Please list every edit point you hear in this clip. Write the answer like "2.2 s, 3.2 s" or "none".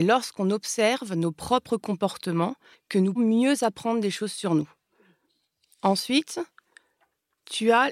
2.7 s, 3.2 s